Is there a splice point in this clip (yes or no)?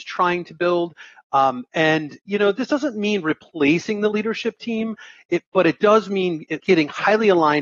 yes